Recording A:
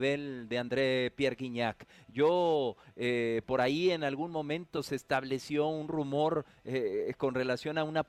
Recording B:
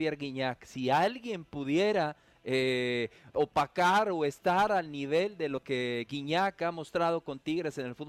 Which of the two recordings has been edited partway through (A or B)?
B